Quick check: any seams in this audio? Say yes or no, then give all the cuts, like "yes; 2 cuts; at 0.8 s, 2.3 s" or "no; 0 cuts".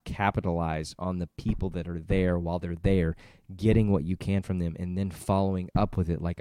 no; 0 cuts